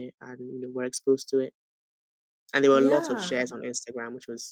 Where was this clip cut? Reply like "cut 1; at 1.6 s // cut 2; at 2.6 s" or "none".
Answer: none